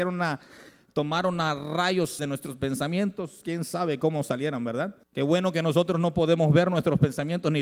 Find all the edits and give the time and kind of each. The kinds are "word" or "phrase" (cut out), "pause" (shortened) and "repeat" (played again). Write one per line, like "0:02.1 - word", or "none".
0:02.2 - word
0:05.0 - pause